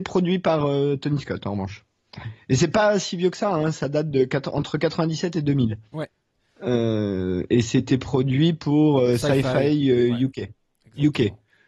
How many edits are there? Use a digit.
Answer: 0